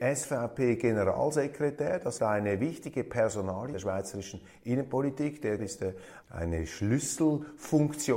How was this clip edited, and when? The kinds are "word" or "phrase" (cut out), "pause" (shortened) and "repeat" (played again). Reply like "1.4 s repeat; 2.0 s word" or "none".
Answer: 2.2 s word; 3.7 s word; 5.6 s word; 6.2 s word